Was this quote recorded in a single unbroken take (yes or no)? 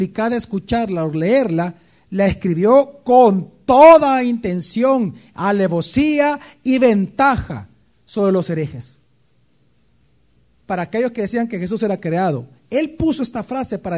yes